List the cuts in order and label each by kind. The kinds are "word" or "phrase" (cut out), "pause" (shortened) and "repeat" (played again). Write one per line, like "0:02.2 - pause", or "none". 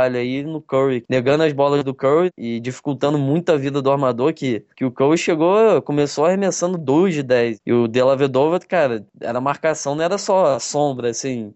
none